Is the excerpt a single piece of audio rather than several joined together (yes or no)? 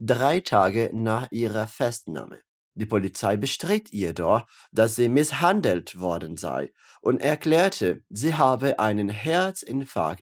yes